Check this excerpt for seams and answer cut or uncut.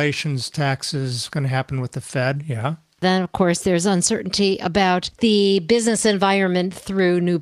cut